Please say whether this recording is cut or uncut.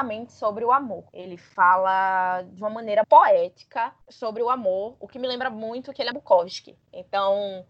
cut